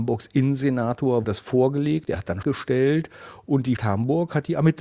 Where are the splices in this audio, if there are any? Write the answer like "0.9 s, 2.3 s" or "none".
1.2 s, 2.4 s, 3.8 s